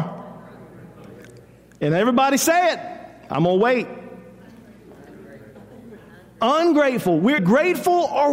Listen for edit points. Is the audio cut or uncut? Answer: cut